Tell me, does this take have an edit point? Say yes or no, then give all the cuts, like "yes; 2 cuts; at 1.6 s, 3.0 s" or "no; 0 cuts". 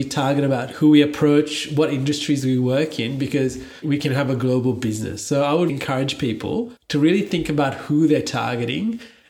yes; 3 cuts; at 3.8 s, 5.7 s, 6.8 s